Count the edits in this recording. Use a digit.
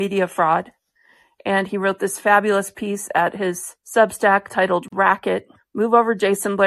2